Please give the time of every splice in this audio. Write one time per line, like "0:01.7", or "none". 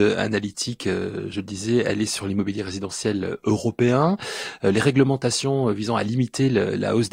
none